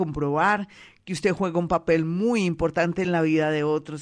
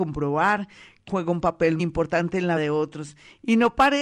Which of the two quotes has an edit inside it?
second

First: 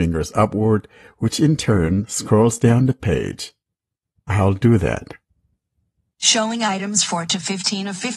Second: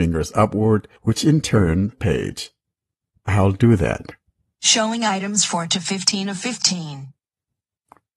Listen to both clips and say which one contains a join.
second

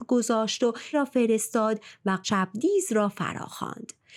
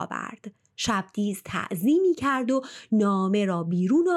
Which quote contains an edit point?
first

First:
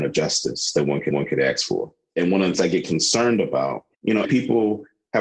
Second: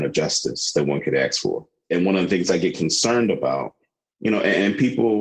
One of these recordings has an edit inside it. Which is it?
first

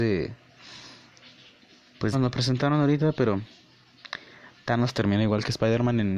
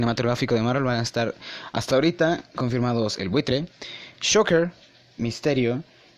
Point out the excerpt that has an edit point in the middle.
first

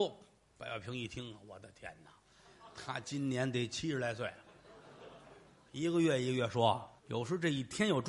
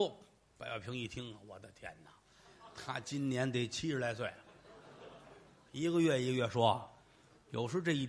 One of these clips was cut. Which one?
first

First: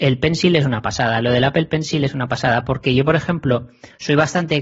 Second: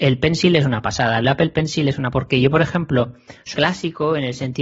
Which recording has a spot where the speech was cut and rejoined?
second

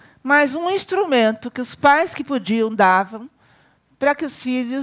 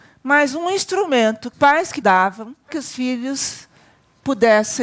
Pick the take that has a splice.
second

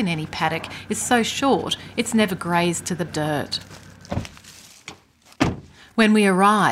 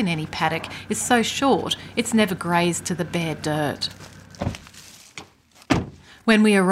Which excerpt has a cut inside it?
first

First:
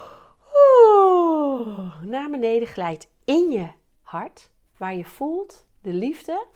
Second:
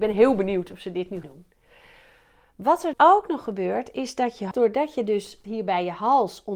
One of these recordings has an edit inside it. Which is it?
second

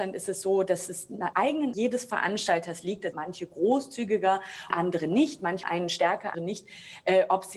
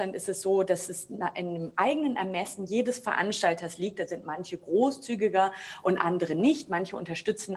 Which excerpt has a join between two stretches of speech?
first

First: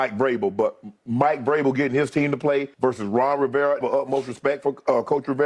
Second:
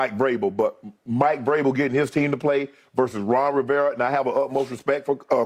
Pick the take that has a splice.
first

